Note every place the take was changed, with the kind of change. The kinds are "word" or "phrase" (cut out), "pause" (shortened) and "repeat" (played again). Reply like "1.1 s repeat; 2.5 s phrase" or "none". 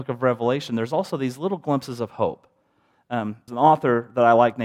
3.5 s word